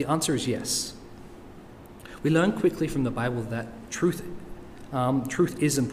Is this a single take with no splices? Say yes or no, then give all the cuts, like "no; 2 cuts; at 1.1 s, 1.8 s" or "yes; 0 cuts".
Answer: yes; 0 cuts